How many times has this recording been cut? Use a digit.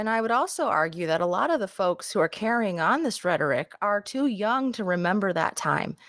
0